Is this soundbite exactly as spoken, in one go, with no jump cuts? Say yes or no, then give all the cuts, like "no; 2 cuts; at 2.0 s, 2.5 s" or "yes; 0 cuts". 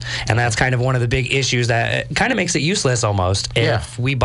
yes; 0 cuts